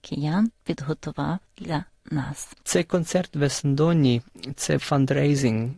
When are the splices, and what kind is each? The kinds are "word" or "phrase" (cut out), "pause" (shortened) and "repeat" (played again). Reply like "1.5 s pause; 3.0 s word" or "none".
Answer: 2.6 s pause; 4.8 s word

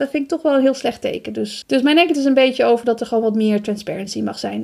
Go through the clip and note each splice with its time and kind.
1.6 s word; 2.1 s word

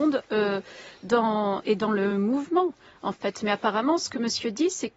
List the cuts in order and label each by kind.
none

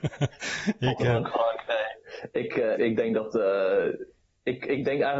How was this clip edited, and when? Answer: 1.3 s word; 2.8 s word

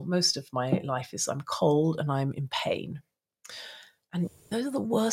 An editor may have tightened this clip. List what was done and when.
none

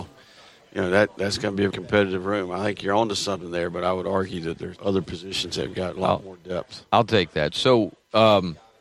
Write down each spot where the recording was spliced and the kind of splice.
1.7 s word; 4.8 s word

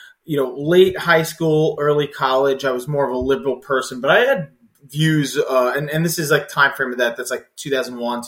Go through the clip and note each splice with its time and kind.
none

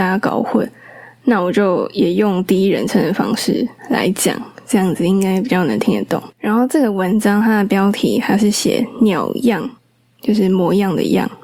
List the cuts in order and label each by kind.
6.3 s pause; 9.8 s pause

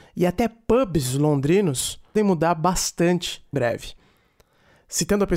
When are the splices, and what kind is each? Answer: 2.2 s word; 3.5 s word

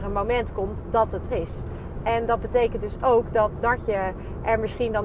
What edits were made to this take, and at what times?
1.3 s word; 3.6 s word

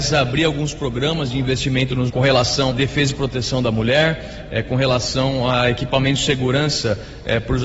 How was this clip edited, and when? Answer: 2.1 s word; 2.7 s word

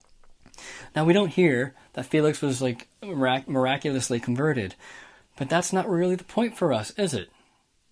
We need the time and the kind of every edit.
none

